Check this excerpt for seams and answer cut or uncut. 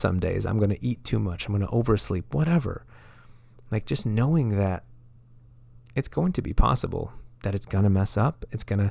uncut